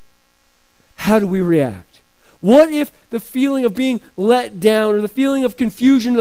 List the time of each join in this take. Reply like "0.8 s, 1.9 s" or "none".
none